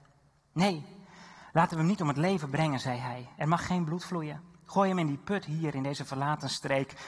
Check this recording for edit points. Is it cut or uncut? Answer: uncut